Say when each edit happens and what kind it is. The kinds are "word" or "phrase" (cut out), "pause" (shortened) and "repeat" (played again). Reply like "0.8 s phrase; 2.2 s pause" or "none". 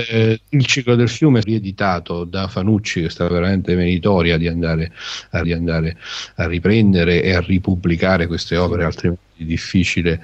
1.4 s phrase; 3.3 s phrase; 5.4 s repeat